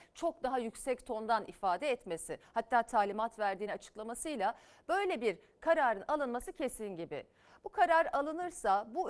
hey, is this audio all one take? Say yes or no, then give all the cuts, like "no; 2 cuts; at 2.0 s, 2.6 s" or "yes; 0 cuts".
yes; 0 cuts